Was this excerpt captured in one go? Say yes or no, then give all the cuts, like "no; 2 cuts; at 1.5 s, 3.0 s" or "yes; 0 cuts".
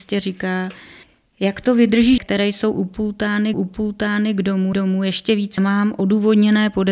no; 5 cuts; at 1.0 s, 2.2 s, 3.5 s, 4.7 s, 5.6 s